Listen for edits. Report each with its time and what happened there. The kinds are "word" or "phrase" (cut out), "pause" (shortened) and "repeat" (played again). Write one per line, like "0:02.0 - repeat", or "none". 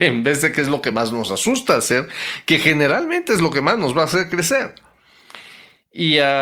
none